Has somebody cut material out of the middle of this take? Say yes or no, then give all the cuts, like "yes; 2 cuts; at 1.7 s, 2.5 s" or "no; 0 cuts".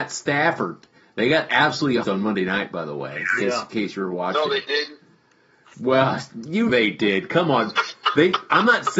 yes; 2 cuts; at 2.0 s, 6.7 s